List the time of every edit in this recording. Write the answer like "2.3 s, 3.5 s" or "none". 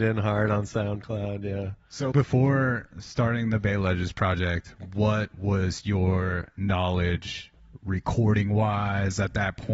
2.1 s